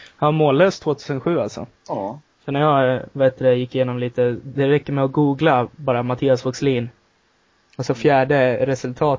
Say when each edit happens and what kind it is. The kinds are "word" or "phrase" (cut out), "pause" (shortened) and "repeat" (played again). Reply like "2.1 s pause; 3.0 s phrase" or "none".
1.8 s pause